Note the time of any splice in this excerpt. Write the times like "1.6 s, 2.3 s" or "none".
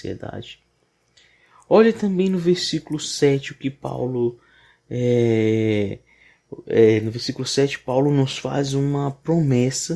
none

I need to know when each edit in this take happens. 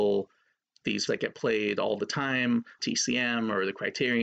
1.1 s, 2.8 s

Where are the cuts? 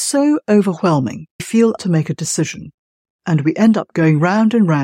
1.4 s, 1.8 s

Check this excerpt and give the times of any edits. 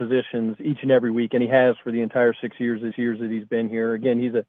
2.9 s

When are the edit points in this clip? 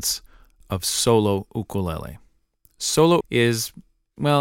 3.2 s

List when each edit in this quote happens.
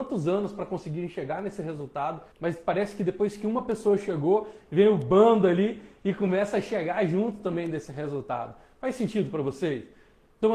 2.3 s

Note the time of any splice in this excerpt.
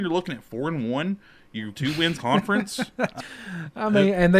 1.7 s, 2.2 s, 3.2 s

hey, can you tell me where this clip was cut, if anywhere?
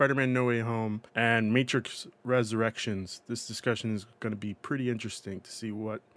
1.1 s

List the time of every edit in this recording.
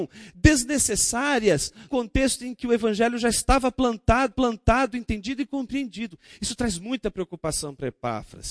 1.9 s, 4.3 s

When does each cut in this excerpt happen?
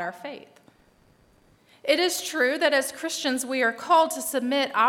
none

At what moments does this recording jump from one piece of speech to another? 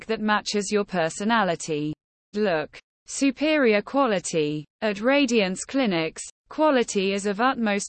2.3 s, 4.7 s

